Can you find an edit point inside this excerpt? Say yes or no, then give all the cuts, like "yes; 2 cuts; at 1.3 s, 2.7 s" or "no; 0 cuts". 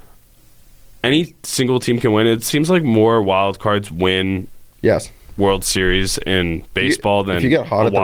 no; 0 cuts